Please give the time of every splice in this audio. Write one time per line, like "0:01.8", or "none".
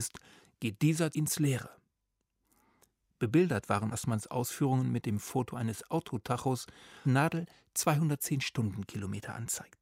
0:01.1
0:03.9
0:07.0